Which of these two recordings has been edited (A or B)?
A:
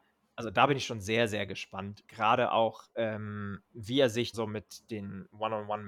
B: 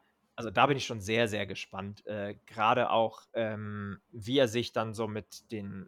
A